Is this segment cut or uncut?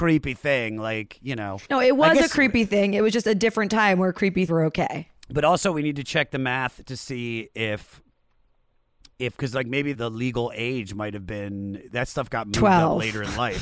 cut